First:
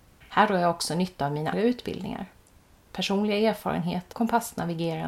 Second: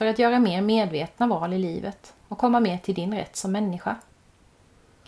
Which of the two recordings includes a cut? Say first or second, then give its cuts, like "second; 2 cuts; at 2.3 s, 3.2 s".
first; 2 cuts; at 1.5 s, 4.1 s